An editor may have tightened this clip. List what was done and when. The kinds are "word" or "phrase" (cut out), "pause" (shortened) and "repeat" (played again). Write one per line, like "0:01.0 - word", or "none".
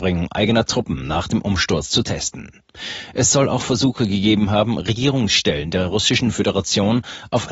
none